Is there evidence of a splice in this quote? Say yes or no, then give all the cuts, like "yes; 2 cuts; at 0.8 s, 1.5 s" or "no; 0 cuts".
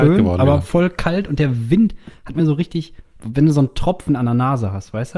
no; 0 cuts